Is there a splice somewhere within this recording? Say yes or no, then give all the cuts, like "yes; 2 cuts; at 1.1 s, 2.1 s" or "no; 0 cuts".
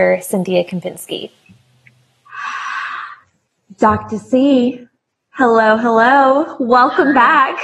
no; 0 cuts